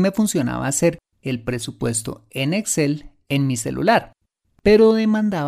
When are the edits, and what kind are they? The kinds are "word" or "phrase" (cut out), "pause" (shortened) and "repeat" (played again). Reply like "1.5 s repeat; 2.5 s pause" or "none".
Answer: none